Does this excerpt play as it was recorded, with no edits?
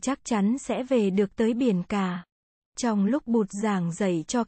yes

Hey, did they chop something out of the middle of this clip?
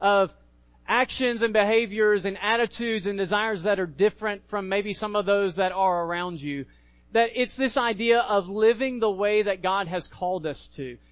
no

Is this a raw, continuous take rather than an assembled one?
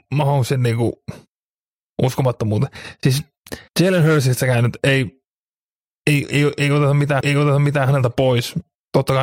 no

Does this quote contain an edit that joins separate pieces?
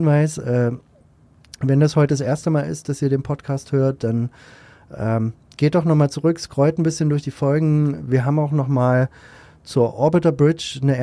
no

